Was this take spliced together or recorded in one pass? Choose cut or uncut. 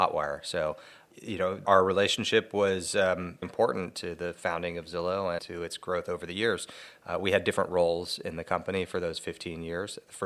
cut